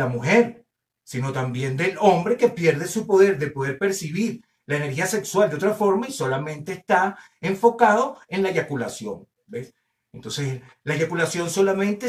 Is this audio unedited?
yes; 0 cuts

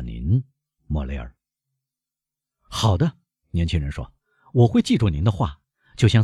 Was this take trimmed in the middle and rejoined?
no; 0 cuts

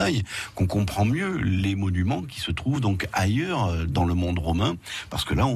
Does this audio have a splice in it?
no; 0 cuts

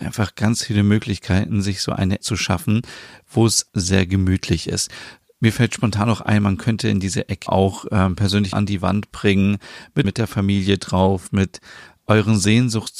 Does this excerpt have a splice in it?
yes; 5 cuts; at 2.2 s, 3.7 s, 7.5 s, 8.5 s, 10.0 s

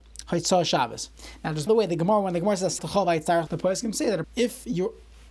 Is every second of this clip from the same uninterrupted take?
no; 4 cuts; at 1.7 s, 2.8 s, 3.5 s, 4.2 s

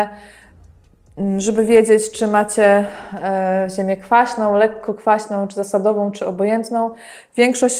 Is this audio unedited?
yes; 0 cuts

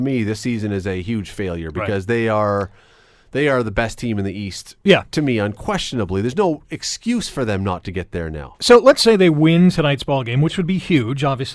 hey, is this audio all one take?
yes; 0 cuts

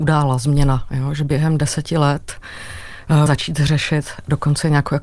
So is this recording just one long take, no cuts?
no; 1 cut; at 3.3 s

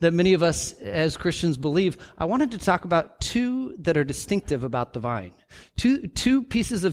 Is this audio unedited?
yes; 0 cuts

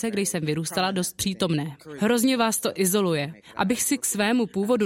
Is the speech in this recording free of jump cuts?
yes; 0 cuts

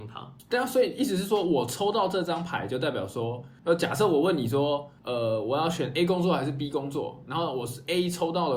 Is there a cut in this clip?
no; 0 cuts

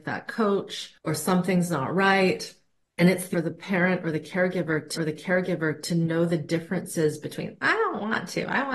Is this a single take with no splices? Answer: no; 4 cuts; at 1.0 s, 2.8 s, 3.3 s, 5.0 s

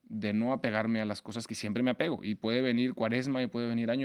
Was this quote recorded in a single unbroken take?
yes; 0 cuts

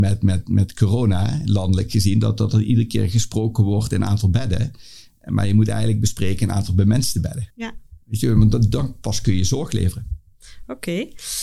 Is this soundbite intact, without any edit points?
no; 1 cut; at 7.5 s

